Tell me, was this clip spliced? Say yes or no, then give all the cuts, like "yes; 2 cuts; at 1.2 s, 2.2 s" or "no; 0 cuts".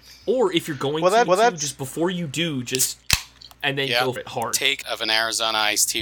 yes; 4 cuts; at 1.3 s, 3.5 s, 4.2 s, 4.8 s